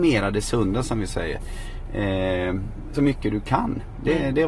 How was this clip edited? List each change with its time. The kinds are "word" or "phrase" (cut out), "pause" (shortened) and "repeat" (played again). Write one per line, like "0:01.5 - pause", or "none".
0:02.9 - word